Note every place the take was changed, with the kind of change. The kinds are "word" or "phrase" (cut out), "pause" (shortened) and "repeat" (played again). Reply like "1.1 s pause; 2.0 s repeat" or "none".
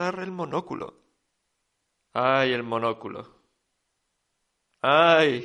1.3 s pause